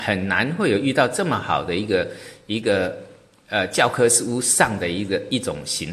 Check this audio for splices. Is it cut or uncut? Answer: uncut